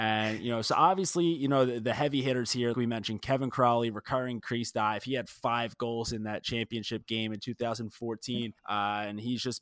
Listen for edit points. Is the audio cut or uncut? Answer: cut